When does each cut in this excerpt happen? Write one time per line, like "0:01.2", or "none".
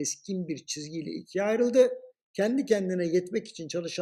0:02.1